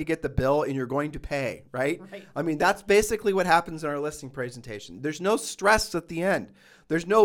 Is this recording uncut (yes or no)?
yes